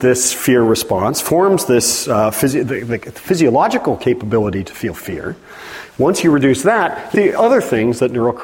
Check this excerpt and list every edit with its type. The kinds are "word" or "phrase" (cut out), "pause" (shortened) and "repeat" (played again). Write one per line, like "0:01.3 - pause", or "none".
0:07.1 - phrase